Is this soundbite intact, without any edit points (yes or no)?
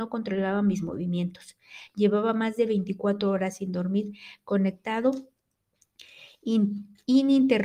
yes